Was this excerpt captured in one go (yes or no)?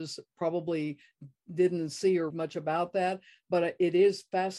no